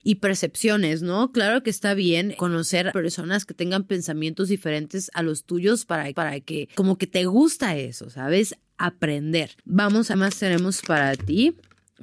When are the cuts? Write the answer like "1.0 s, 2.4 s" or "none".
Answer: 2.9 s, 6.1 s, 9.6 s, 10.1 s